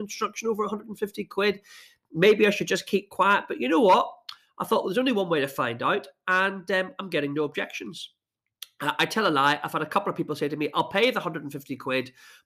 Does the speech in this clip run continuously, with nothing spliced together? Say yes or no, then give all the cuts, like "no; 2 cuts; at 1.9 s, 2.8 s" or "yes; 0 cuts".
yes; 0 cuts